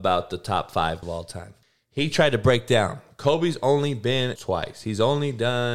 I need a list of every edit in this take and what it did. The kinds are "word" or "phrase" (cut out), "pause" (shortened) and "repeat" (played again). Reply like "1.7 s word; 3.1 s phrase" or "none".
1.0 s word; 1.6 s pause; 4.4 s phrase